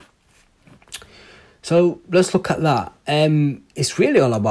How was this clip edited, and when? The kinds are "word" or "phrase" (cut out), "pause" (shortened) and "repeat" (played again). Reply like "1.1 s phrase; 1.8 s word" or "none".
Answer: none

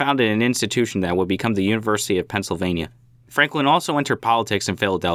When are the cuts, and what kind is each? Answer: none

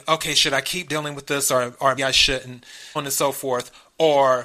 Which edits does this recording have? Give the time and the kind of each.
2.0 s word; 3.0 s word

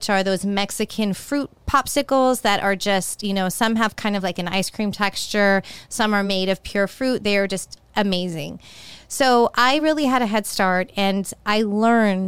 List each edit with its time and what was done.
none

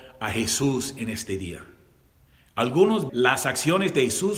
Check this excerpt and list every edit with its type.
3.1 s word

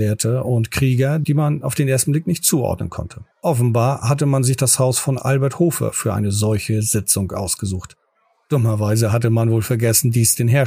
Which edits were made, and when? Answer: 3.3 s pause

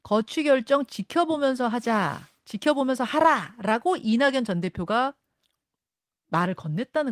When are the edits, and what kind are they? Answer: none

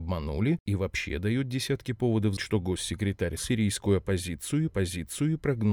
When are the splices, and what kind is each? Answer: 2.4 s word; 3.4 s phrase; 4.7 s repeat

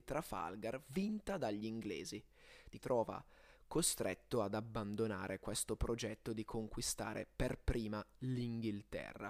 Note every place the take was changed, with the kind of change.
2.8 s phrase

